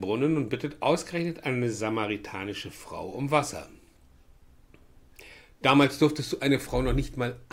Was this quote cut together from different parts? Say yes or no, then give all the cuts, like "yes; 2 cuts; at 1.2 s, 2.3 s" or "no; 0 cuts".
no; 0 cuts